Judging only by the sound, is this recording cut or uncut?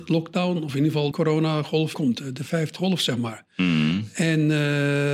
cut